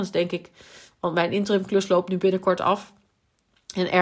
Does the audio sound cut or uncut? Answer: uncut